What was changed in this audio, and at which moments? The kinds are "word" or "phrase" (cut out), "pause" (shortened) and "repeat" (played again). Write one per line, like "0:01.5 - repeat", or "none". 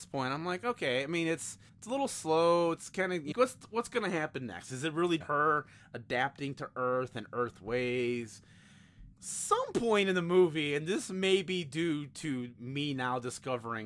0:01.7 - pause
0:03.3 - phrase
0:05.2 - word
0:09.1 - pause